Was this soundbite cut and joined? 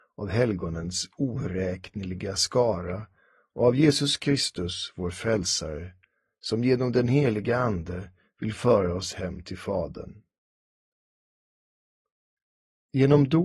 no; 0 cuts

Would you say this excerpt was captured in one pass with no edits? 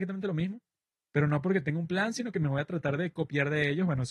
yes; 0 cuts

